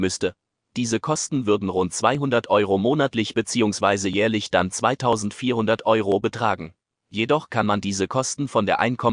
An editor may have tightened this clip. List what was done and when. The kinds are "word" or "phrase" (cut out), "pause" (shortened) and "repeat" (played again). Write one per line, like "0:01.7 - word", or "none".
none